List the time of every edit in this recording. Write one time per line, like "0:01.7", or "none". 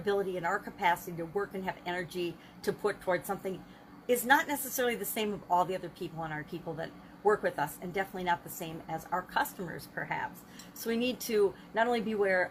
0:06.4